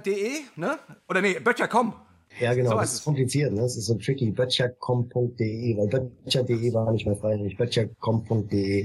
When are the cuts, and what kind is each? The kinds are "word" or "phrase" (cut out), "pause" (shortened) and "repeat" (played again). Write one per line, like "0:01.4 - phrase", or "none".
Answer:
0:06.2 - pause